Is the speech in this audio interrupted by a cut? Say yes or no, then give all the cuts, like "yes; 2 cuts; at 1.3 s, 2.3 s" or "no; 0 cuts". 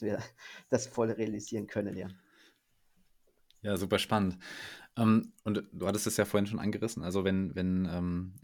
no; 0 cuts